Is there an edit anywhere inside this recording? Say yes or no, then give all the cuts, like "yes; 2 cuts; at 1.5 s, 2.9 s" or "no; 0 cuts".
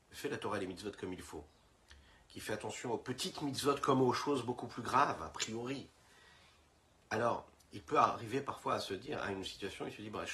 no; 0 cuts